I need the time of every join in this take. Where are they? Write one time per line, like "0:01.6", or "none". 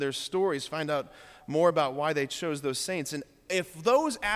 none